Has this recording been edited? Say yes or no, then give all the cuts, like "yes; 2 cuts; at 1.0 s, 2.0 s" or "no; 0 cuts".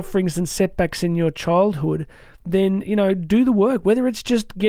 no; 0 cuts